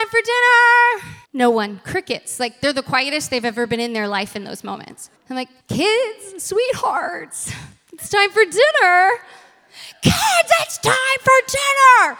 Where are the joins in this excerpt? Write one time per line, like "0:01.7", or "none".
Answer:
0:01.2
0:05.2
0:05.6